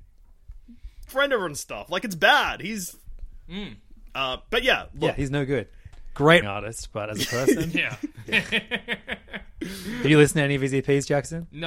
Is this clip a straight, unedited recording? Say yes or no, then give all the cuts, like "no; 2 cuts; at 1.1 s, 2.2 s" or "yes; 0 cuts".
no; 2 cuts; at 1.1 s, 6.4 s